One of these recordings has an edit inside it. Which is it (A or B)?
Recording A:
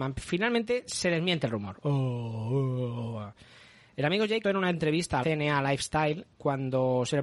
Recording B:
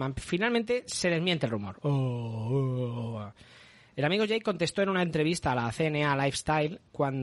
A